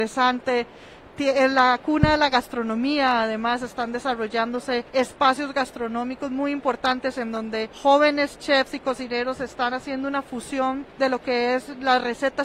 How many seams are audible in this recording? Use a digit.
3